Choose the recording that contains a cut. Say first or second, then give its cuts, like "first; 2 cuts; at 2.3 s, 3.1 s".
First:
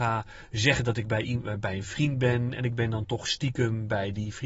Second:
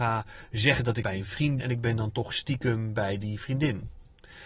second; 2 cuts; at 1.0 s, 1.6 s